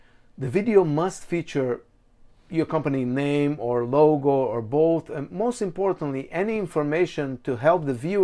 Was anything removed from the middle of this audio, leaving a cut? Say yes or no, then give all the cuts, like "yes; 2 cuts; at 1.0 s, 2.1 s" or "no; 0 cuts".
no; 0 cuts